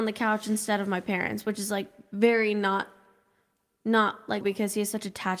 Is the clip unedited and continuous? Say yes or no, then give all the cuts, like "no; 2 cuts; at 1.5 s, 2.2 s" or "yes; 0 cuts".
no; 1 cut; at 4.4 s